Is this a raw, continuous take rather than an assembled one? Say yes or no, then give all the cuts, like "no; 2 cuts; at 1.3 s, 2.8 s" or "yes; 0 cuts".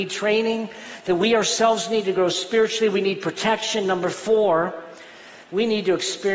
no; 1 cut; at 5.4 s